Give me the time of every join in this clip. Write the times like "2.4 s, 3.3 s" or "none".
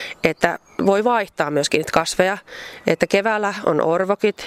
none